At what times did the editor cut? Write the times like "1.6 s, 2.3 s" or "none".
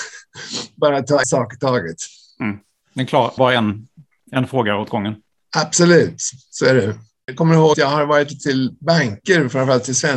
1.2 s, 3.4 s, 7.7 s, 8.4 s